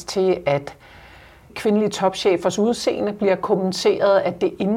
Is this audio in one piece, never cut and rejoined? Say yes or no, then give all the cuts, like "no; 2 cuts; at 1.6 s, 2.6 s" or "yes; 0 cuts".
yes; 0 cuts